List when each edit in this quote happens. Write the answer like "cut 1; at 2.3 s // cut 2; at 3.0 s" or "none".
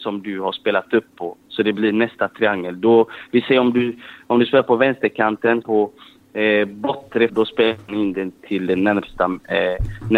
cut 1; at 5.6 s // cut 2; at 7.3 s